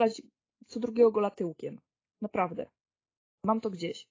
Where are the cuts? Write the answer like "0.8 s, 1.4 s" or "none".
none